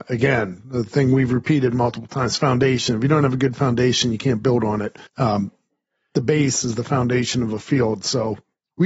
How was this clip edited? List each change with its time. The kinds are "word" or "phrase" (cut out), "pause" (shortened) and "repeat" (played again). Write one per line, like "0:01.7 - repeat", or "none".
0:05.1 - pause